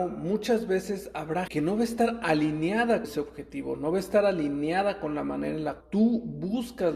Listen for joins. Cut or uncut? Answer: cut